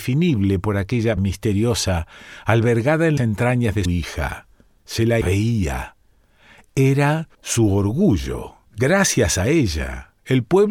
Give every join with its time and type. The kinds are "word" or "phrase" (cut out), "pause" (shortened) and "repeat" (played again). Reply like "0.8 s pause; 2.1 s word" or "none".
1.2 s word; 3.2 s word; 3.9 s word; 5.2 s phrase; 7.3 s pause; 8.7 s pause